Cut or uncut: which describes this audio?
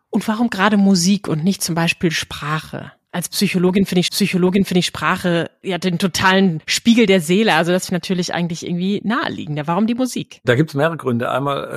cut